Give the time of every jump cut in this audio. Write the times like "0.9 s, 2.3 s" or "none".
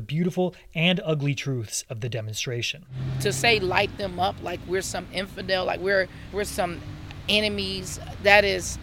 6.3 s